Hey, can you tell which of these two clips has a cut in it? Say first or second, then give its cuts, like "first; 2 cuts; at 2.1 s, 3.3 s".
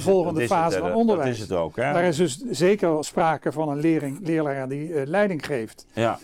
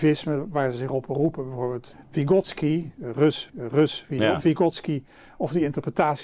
second; 2 cuts; at 1.9 s, 3.5 s